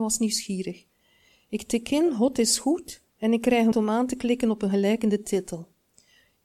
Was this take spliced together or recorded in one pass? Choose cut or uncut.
cut